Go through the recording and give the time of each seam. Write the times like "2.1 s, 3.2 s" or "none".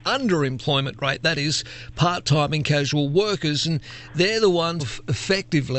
4.8 s

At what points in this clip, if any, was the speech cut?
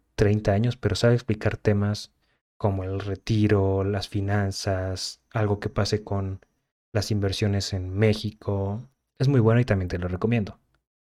none

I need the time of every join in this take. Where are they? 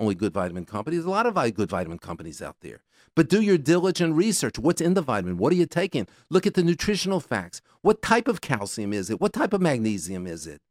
none

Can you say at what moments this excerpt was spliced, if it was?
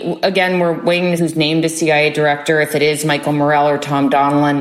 1.2 s

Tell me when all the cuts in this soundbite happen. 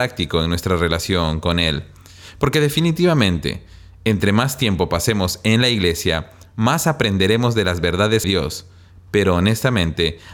8.2 s

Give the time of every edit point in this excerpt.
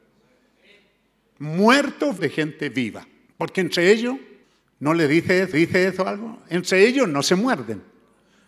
2.2 s, 3.3 s, 4.4 s, 5.5 s

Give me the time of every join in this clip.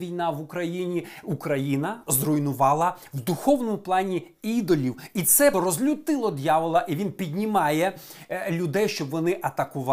5.5 s

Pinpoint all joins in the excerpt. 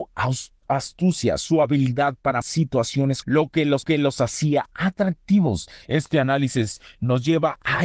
2.4 s, 3.2 s, 3.8 s

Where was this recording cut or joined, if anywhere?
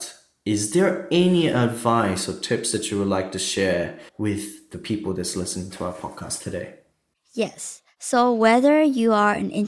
4.1 s, 6.9 s

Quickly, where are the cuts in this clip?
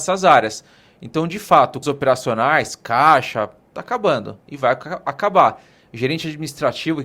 1.8 s

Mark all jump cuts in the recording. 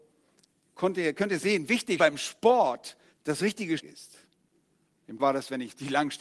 1.7 s, 2.0 s, 3.1 s, 3.8 s, 5.2 s

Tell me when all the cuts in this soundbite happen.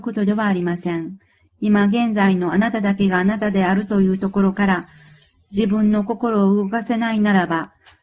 none

